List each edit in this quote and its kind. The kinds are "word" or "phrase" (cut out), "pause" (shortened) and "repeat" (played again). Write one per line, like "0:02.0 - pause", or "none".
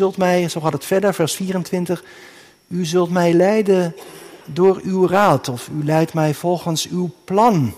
0:04.4 - pause